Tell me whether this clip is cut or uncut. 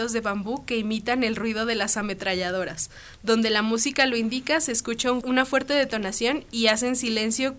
cut